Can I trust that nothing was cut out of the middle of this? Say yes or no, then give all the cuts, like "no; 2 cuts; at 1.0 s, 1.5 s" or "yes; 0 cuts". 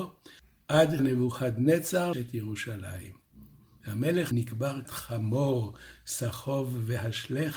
no; 4 cuts; at 1.0 s, 2.1 s, 4.3 s, 4.8 s